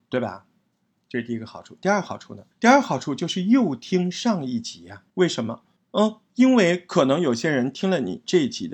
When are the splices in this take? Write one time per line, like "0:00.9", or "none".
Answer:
0:02.5
0:05.1
0:05.8